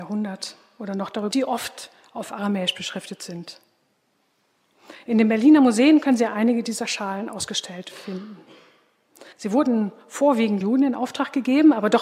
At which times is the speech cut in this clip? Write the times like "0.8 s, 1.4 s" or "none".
1.3 s, 9.3 s, 10.6 s